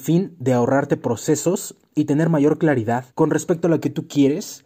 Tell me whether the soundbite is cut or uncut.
cut